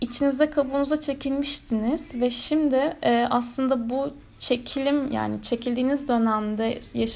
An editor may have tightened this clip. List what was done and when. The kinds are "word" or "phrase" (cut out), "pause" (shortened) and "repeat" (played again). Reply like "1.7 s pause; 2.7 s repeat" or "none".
none